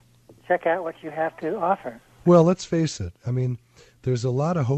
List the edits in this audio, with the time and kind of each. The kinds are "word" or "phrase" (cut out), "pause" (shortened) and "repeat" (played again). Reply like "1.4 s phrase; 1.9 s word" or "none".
none